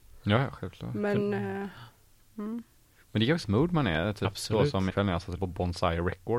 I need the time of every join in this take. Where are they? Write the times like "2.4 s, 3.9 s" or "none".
3.4 s, 4.9 s, 5.4 s